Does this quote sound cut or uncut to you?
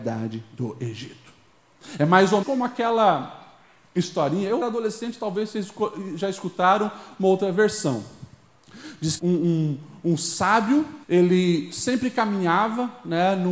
cut